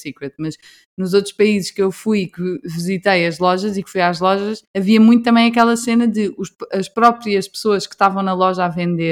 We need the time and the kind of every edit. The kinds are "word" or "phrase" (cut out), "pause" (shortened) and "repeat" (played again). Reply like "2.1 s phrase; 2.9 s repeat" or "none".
4.7 s pause